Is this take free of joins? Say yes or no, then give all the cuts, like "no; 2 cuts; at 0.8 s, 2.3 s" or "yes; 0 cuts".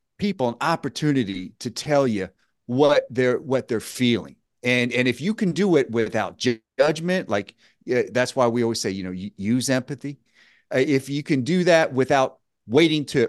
yes; 0 cuts